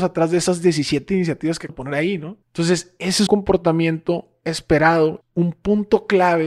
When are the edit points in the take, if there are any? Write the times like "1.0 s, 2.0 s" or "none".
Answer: 1.7 s, 2.4 s, 3.3 s, 5.2 s

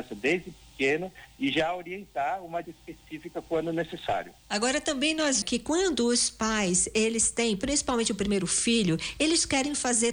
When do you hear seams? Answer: 2.6 s, 4.4 s, 5.4 s

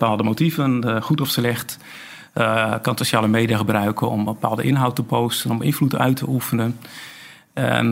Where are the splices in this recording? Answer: none

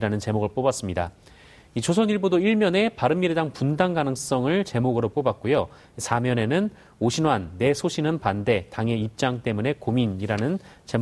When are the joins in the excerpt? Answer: none

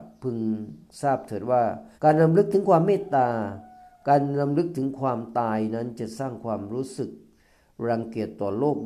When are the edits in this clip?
1.9 s

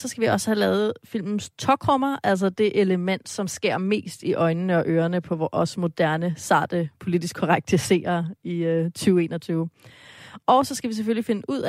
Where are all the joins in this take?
none

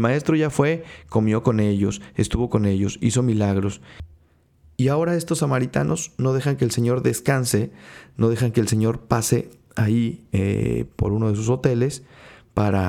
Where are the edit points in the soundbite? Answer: none

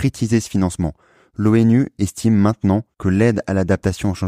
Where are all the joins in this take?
none

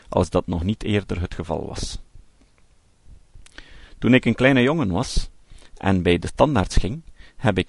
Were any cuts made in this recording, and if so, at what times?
none

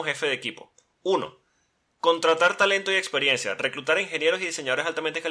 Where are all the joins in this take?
none

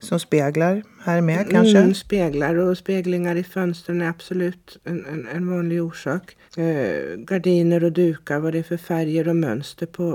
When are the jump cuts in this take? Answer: 6.5 s

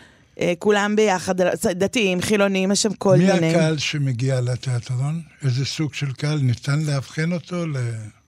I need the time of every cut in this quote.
none

